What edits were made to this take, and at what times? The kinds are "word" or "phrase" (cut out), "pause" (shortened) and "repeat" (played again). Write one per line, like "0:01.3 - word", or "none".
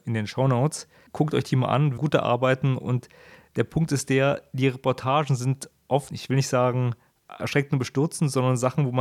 0:02.0 - word
0:06.1 - word
0:07.4 - word

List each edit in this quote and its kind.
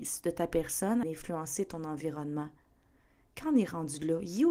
0:01.0 - word

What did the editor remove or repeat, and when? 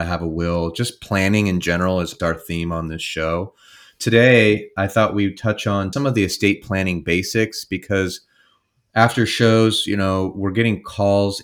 0:02.2 - word
0:05.9 - word

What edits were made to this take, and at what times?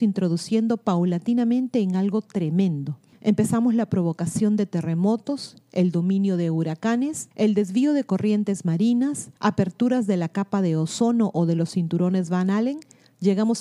0:03.1 - pause
0:07.3 - pause
0:09.4 - pause

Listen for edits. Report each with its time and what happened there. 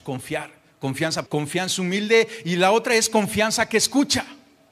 0:01.3 - word

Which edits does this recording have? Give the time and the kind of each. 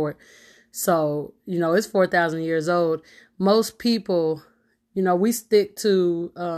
none

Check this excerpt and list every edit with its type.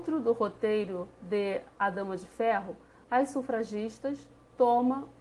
0:01.7 - pause

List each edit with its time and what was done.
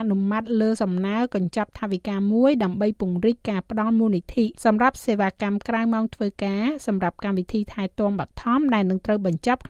0:04.5 - pause

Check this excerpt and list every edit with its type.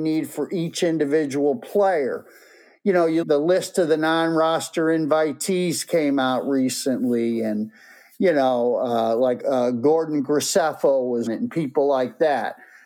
0:03.2 - phrase
0:09.4 - word
0:11.3 - word

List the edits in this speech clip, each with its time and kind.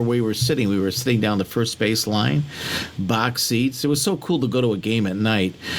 none

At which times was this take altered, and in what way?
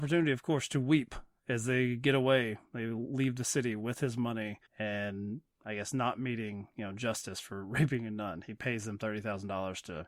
0:04.7 - pause

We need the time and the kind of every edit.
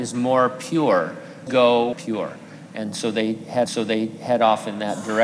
0:01.5 - word
0:01.9 - phrase
0:03.7 - repeat

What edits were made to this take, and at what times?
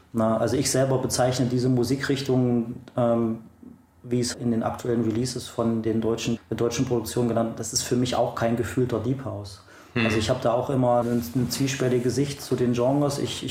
0:04.3 - word
0:06.4 - word
0:11.0 - word

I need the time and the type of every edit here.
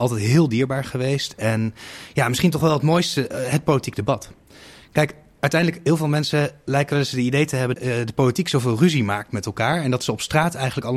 0:07.7 - word

